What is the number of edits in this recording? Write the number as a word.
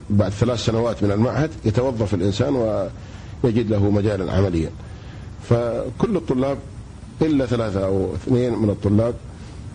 zero